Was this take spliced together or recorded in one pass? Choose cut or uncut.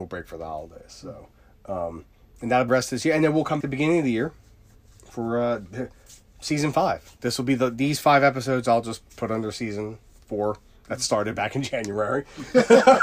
cut